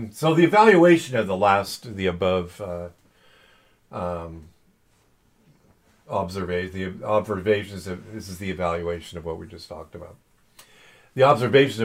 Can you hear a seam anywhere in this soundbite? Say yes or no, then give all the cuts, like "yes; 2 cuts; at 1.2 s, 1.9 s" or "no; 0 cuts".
no; 0 cuts